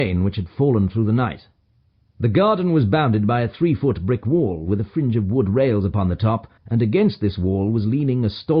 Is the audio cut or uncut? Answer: cut